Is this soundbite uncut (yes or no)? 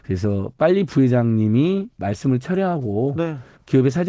no